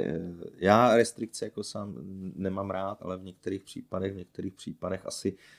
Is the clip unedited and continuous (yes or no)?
no